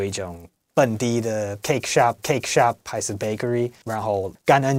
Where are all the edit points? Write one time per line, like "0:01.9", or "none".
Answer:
0:02.2

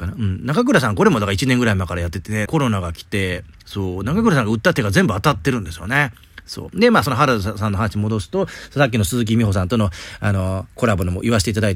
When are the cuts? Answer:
0:02.5

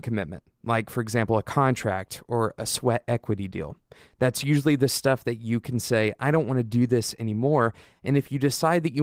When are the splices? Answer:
none

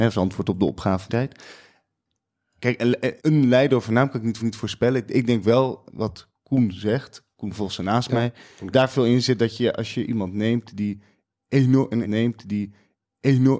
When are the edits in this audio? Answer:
0:01.1
0:03.2
0:04.4
0:05.9
0:07.3
0:08.7
0:12.0

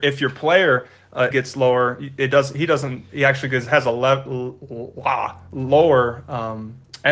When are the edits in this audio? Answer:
0:01.3

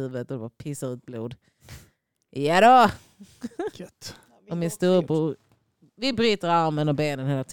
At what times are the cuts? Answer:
none

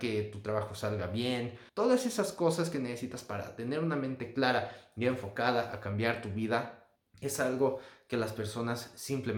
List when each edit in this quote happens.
0:01.7
0:07.0

